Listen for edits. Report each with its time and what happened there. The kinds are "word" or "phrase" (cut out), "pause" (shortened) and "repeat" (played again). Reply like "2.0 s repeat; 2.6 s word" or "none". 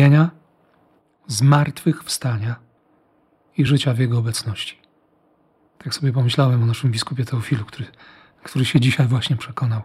none